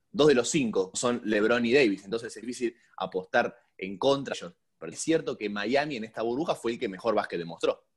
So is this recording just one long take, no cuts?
no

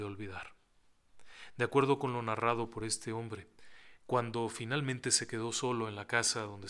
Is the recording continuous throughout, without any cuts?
yes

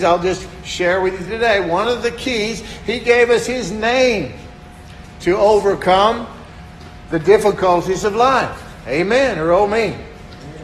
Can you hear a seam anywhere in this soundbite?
no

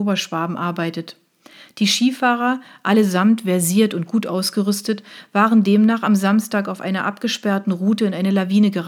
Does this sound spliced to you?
no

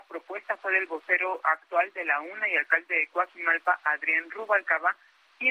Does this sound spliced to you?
no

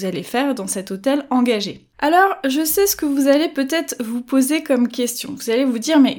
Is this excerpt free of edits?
no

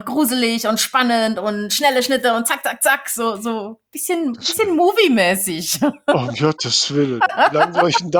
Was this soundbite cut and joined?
no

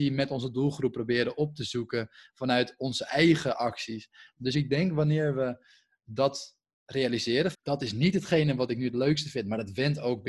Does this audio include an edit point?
yes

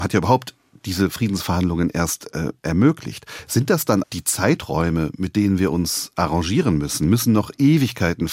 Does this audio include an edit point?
yes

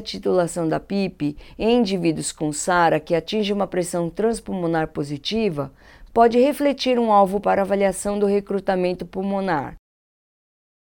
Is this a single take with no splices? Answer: no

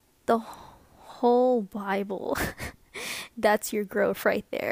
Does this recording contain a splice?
no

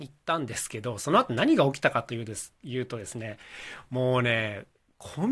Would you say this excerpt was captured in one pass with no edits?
no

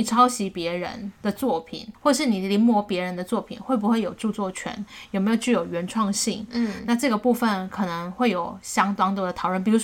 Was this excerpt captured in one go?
no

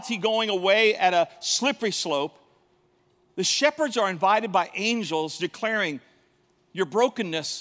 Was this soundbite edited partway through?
no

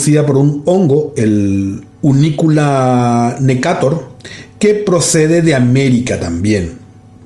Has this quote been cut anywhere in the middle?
yes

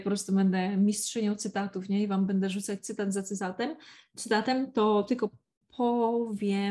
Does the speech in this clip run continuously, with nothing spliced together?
yes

